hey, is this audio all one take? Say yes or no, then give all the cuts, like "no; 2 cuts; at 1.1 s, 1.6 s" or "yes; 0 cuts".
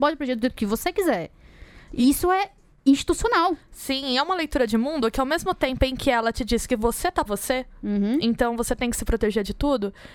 no; 1 cut; at 7.2 s